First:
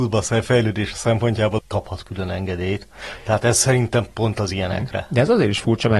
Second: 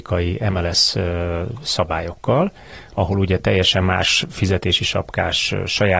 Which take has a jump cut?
first; 1 cut; at 1.6 s

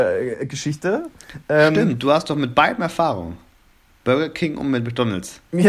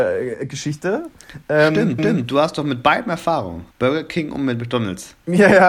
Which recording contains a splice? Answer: second; 2 cuts; at 2.0 s, 3.7 s

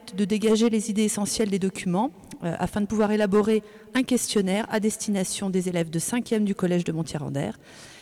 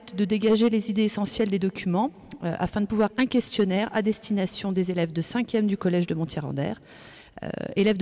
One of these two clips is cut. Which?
second; 1 cut; at 3.1 s

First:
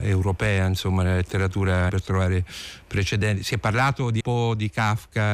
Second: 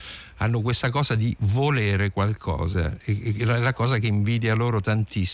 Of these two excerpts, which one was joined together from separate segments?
first; 2 cuts; at 1.9 s, 4.2 s

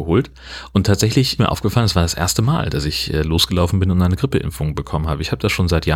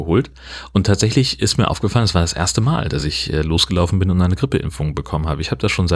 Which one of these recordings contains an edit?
first; 1 cut; at 1.4 s

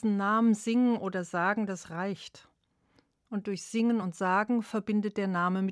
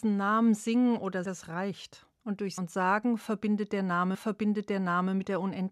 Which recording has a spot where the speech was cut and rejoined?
second; 4 cuts; at 1.2 s, 2.1 s, 2.6 s, 4.1 s

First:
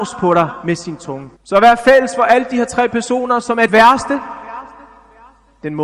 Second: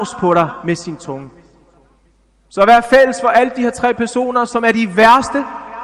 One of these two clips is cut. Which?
first; 2 cuts; at 1.3 s, 3.7 s

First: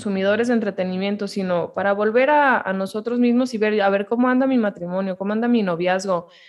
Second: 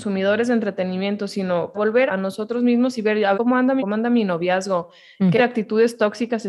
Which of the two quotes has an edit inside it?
second; 5 cuts; at 1.7 s, 2.1 s, 3.3 s, 3.8 s, 5.4 s

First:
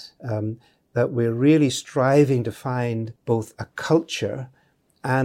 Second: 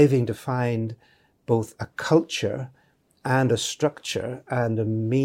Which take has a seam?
first; 1 cut; at 3.2 s

